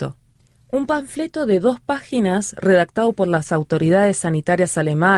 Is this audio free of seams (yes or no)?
yes